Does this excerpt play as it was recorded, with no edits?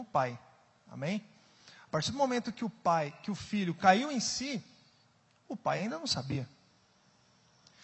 yes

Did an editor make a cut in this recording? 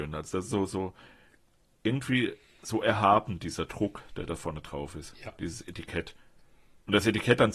no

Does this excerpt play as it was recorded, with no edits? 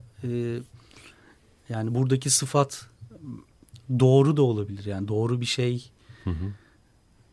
yes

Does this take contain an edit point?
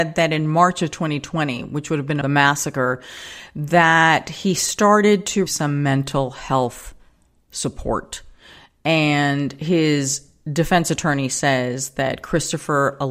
yes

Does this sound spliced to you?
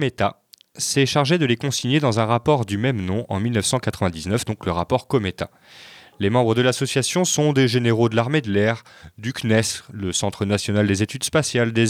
no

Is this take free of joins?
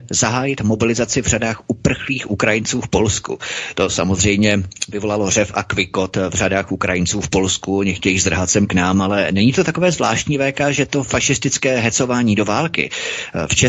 yes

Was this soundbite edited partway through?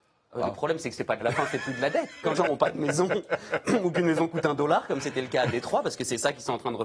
yes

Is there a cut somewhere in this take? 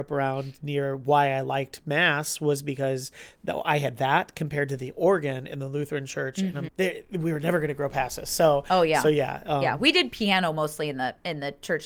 yes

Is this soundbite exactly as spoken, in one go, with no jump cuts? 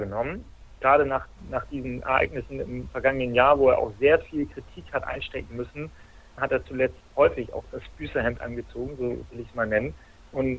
yes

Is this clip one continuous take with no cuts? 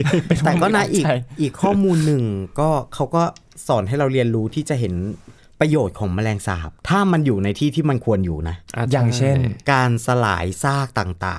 no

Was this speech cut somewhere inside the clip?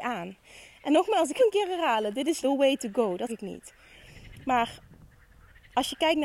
yes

